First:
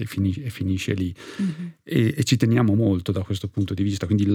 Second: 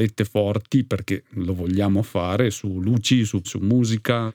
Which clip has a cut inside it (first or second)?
second